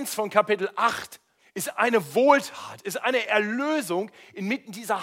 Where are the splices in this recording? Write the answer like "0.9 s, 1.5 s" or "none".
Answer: 1.4 s